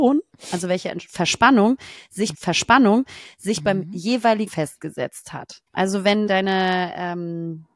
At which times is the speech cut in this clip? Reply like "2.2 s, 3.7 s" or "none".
2.3 s, 4.5 s, 5.7 s, 6.3 s